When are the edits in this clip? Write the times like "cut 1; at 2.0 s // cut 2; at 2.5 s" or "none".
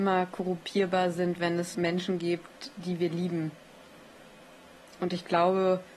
cut 1; at 1.7 s